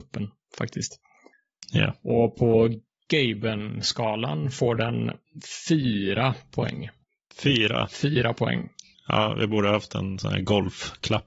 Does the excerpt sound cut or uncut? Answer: uncut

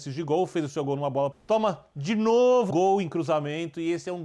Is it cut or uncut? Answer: cut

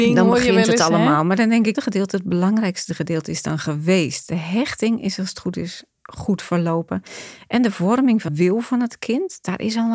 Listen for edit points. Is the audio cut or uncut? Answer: cut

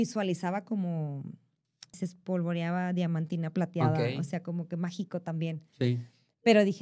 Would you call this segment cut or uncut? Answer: cut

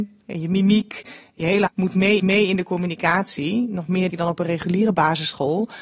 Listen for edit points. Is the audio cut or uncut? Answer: cut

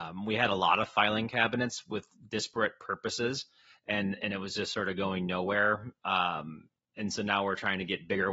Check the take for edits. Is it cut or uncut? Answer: uncut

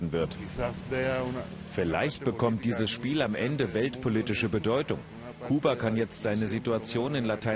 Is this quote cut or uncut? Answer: uncut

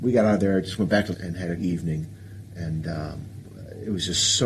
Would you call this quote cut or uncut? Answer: cut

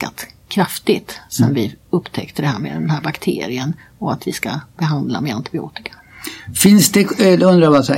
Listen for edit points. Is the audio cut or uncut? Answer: uncut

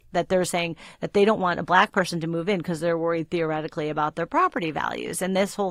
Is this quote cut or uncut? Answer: uncut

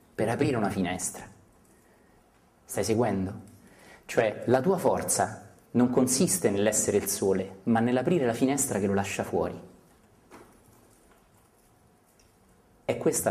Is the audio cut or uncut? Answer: uncut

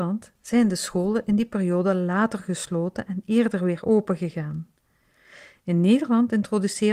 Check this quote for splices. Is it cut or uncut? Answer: uncut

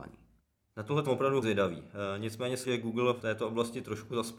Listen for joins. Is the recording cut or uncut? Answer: cut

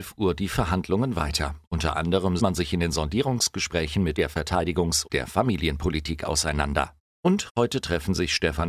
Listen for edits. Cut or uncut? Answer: cut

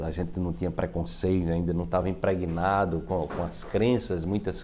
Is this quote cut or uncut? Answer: uncut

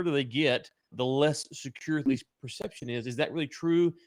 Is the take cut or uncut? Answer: cut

